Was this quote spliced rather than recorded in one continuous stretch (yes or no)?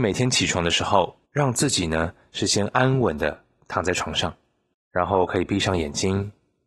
yes